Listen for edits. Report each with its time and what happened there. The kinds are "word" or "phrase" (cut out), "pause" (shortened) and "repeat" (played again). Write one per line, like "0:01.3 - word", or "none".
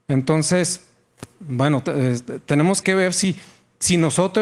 0:01.3 - pause
0:02.8 - word